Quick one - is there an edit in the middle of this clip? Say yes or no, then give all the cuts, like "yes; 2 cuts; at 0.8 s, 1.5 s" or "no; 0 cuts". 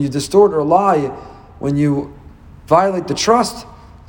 no; 0 cuts